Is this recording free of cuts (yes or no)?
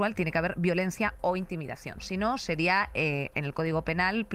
yes